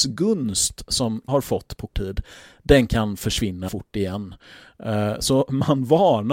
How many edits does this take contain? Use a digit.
3